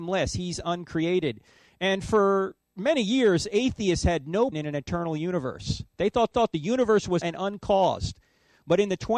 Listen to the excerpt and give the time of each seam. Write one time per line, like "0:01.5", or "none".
0:02.6
0:04.5
0:06.3
0:07.2

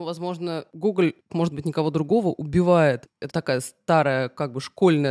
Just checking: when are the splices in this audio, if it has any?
0:01.3
0:03.3

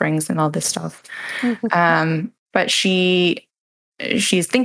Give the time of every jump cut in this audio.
0:02.4

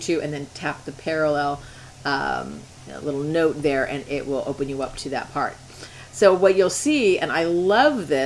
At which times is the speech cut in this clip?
none

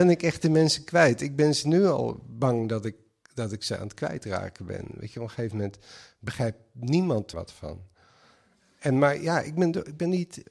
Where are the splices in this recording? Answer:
0:07.3

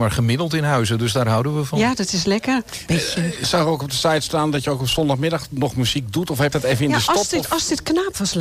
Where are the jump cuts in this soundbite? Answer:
0:06.5

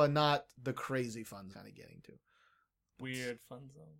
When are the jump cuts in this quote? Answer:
0:01.5
0:03.0

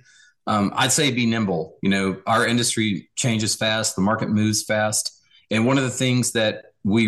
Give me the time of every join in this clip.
none

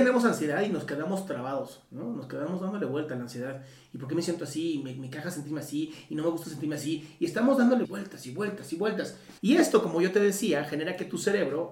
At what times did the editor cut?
0:07.8
0:09.4

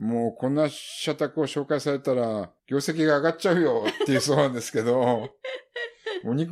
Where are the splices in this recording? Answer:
0:02.6

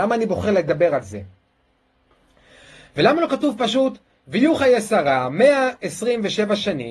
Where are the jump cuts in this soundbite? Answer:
none

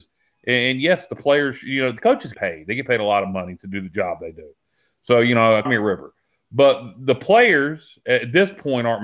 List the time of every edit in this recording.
0:02.3
0:05.6

